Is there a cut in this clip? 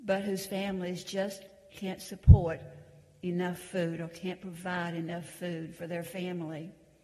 no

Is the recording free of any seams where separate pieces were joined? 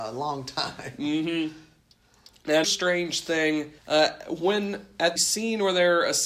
no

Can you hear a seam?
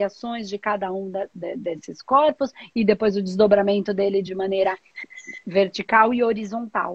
no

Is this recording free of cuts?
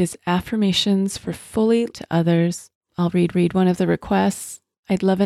no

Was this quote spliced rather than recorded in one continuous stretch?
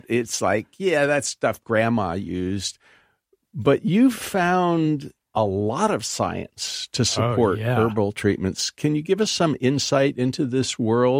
no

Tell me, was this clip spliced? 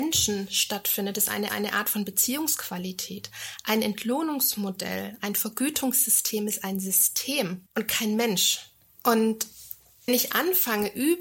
yes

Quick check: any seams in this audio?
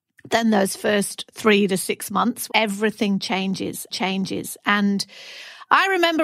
yes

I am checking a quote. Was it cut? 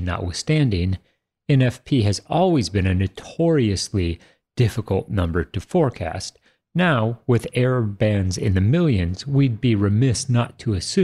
no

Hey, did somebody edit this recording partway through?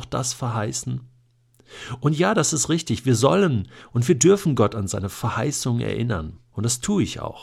yes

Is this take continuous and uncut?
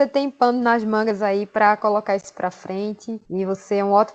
no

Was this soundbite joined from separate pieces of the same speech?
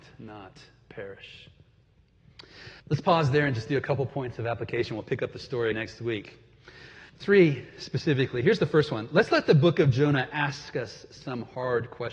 yes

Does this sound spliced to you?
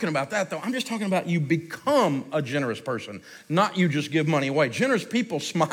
no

